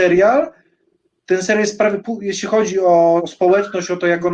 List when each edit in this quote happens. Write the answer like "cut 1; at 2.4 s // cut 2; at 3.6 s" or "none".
cut 1; at 2.0 s // cut 2; at 3.2 s